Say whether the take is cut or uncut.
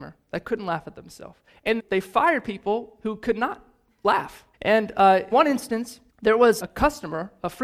cut